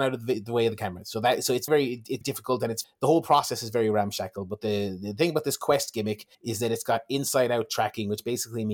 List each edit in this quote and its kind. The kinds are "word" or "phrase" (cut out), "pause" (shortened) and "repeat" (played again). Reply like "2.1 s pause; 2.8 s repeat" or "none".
1.7 s word; 2.2 s word; 2.8 s word; 6.3 s pause